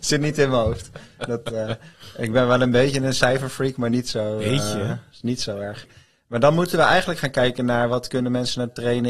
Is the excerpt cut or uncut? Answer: uncut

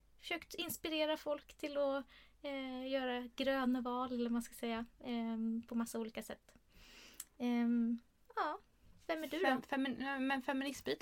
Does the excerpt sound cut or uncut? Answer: uncut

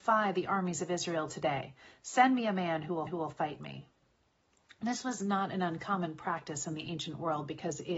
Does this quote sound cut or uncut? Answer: cut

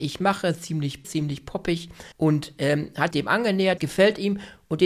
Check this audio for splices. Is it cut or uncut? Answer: cut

